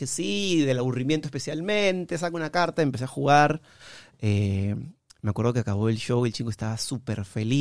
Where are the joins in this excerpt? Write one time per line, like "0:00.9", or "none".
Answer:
none